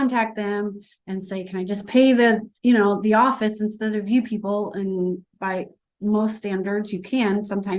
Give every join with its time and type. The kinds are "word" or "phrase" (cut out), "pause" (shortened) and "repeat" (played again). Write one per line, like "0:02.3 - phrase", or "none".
0:02.6 - pause
0:05.3 - pause